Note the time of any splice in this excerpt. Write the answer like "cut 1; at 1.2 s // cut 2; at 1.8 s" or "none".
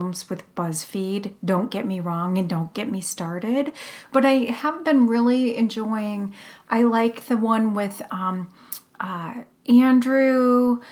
cut 1; at 9.5 s